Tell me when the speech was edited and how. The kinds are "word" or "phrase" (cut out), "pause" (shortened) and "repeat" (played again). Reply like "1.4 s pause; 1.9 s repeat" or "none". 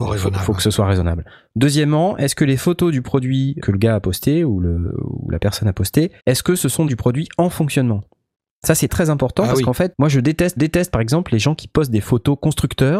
3.6 s word; 6.2 s pause; 6.9 s phrase; 8.9 s word; 9.9 s word; 10.6 s repeat

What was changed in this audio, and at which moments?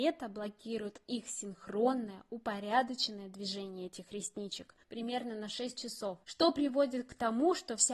4.8 s pause; 6.2 s pause

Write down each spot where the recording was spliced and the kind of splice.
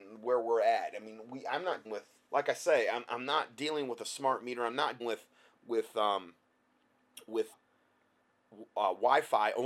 1.8 s word; 2.3 s pause; 5.0 s word; 7.5 s word

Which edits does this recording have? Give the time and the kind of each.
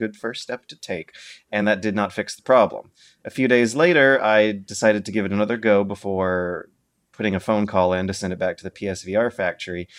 none

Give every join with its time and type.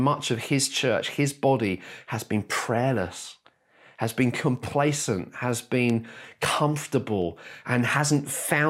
none

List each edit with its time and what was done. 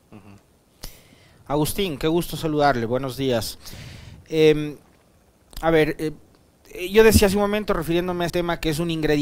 8.3 s word

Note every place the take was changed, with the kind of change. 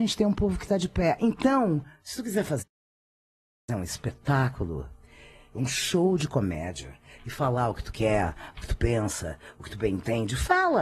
none

